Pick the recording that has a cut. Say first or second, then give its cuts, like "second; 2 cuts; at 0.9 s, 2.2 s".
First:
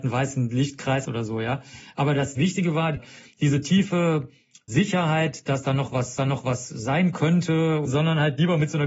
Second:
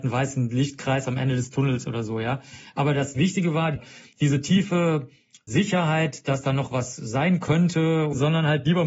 first; 2 cuts; at 1.1 s, 6.2 s